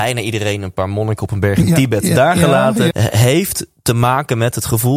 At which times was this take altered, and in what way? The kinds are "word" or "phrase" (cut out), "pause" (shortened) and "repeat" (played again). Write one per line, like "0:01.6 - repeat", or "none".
0:02.9 - word